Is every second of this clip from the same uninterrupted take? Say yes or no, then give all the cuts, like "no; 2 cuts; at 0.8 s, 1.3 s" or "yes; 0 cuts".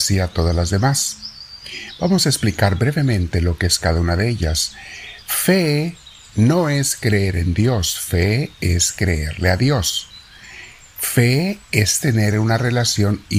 yes; 0 cuts